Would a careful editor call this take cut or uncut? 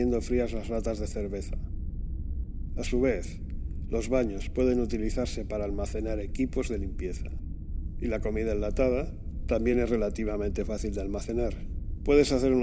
uncut